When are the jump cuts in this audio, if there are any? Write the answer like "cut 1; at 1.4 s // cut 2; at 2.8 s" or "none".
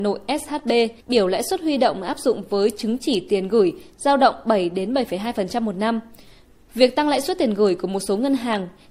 cut 1; at 1.0 s